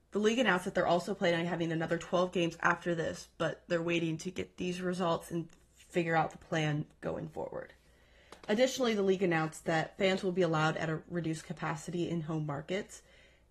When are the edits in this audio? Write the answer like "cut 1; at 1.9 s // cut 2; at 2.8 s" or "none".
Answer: none